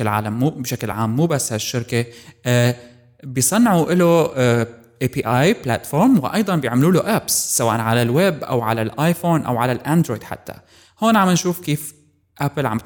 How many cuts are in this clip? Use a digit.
0